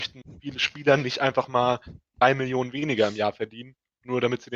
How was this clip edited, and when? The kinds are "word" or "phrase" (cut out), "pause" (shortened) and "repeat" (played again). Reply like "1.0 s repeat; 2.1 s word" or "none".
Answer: none